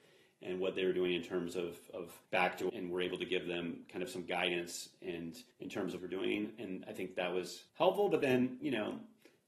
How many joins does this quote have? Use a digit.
5